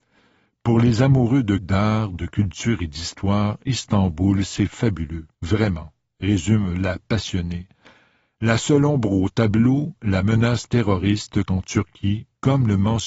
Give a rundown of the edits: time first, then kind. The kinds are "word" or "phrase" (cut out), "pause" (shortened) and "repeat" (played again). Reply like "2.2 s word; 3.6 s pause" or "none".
1.6 s word; 5.3 s pause; 11.5 s word